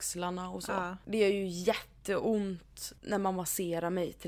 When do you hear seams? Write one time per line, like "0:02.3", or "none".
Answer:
0:02.9